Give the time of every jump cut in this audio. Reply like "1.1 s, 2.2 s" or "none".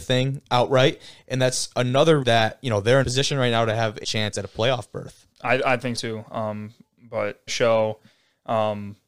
2.2 s, 3.0 s, 4.0 s, 5.3 s, 6.0 s, 7.5 s

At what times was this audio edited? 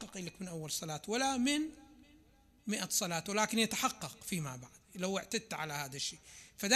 none

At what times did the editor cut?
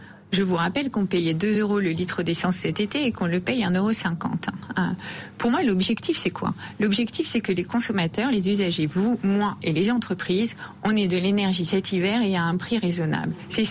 none

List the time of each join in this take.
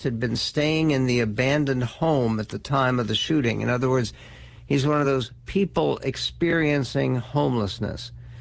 none

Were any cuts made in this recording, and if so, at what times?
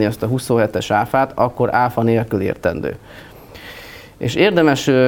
none

